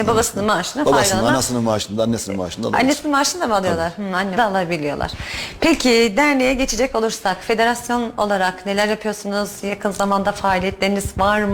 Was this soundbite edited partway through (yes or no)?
yes